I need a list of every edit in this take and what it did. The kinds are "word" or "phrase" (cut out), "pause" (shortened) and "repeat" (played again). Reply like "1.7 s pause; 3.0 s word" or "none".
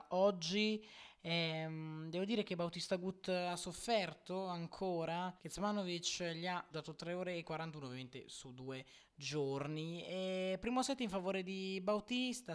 5.4 s pause; 6.7 s phrase